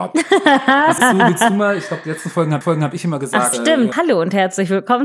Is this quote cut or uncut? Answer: cut